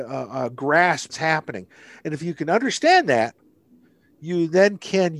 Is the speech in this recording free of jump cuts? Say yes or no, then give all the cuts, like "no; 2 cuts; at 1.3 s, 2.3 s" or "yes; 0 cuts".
no; 1 cut; at 1.1 s